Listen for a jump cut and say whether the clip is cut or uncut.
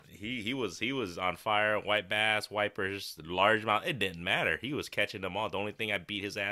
uncut